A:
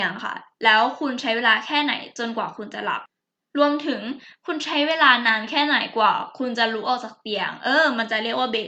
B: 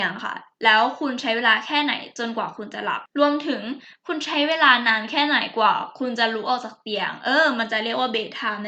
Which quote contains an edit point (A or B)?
B